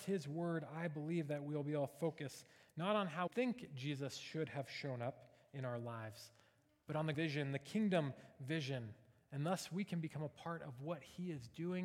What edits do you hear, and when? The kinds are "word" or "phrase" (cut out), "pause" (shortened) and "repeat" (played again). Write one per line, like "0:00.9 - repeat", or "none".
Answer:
0:03.3 - word
0:07.1 - word